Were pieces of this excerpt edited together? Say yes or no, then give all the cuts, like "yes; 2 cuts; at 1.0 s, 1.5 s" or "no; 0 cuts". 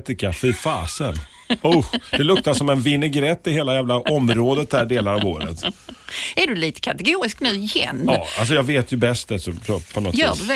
no; 0 cuts